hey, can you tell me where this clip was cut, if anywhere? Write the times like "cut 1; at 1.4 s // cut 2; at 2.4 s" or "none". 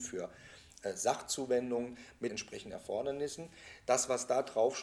cut 1; at 2.3 s